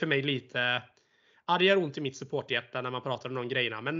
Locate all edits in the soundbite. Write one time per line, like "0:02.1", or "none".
none